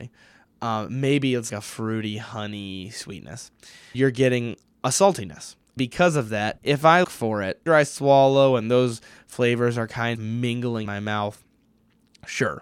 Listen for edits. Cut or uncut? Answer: cut